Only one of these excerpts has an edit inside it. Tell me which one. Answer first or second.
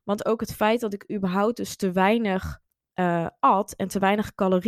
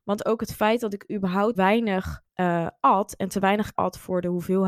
second